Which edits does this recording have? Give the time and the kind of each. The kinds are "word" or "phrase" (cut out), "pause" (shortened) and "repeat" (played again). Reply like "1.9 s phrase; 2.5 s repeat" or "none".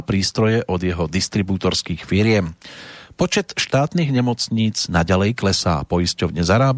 none